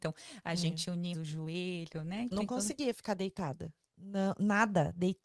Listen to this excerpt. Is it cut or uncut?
cut